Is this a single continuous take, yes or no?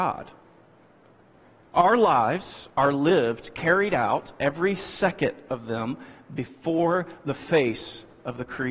yes